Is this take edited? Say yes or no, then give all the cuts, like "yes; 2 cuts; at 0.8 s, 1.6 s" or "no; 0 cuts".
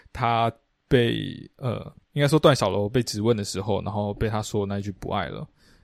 yes; 1 cut; at 2.0 s